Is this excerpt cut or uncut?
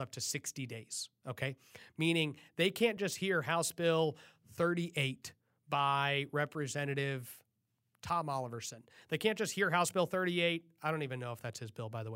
uncut